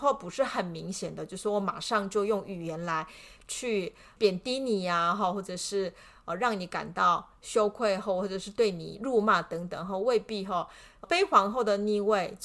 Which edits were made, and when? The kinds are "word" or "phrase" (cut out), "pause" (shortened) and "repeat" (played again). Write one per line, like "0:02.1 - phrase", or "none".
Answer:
0:11.0 - word